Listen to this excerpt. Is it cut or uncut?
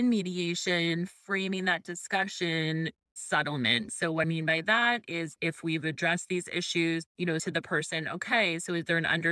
cut